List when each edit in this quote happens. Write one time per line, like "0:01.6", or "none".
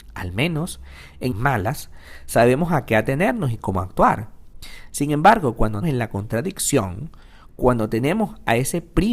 0:01.3
0:05.8